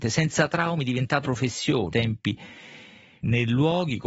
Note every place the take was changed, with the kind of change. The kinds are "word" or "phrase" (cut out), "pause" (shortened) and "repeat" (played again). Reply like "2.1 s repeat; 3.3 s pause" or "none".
1.2 s word; 1.9 s phrase